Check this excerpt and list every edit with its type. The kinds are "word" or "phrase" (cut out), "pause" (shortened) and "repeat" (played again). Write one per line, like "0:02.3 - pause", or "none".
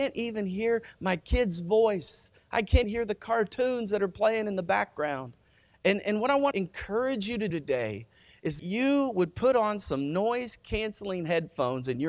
0:02.8 - word
0:06.5 - word
0:07.5 - word
0:08.6 - word